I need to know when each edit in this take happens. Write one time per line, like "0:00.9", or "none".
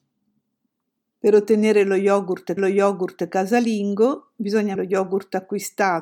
0:02.6
0:04.7